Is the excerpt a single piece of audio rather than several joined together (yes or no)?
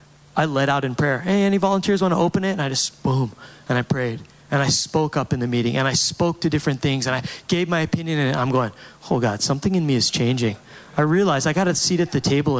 yes